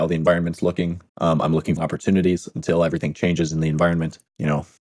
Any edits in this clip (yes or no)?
yes